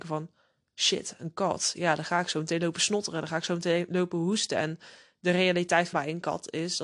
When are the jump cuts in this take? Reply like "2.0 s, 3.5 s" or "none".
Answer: 5.9 s